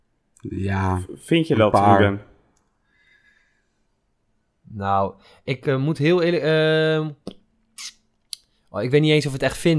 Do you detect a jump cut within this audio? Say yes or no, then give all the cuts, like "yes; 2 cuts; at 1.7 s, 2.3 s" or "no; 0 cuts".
no; 0 cuts